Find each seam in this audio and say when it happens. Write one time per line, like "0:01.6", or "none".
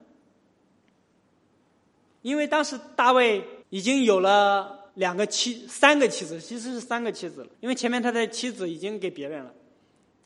0:03.6
0:04.9
0:07.5